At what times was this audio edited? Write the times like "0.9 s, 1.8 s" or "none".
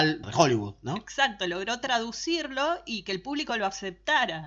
none